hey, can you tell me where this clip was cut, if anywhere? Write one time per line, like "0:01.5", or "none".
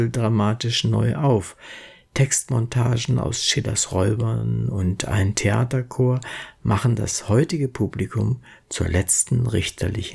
none